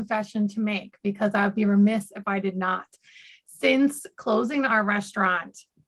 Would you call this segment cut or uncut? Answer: uncut